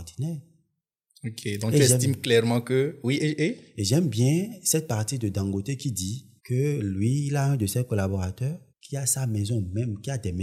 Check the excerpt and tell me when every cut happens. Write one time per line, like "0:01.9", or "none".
0:06.4
0:08.7

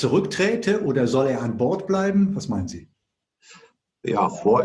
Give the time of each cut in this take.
none

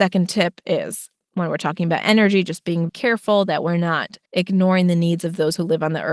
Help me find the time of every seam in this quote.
0:02.9
0:04.3

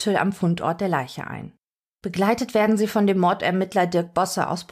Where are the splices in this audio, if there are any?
none

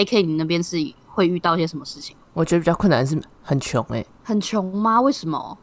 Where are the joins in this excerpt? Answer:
0:02.2
0:04.1

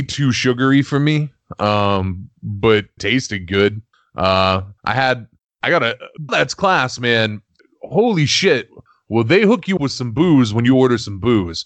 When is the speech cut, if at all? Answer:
0:03.0
0:04.8
0:06.3
0:09.8

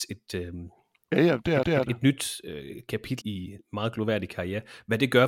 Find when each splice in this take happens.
0:01.6
0:03.2

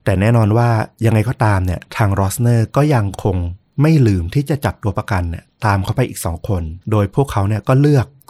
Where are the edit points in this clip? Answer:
0:01.9
0:06.8

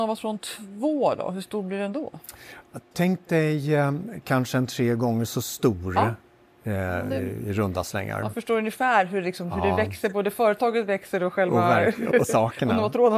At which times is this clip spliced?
0:12.1

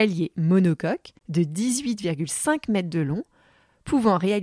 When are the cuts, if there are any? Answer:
0:01.2

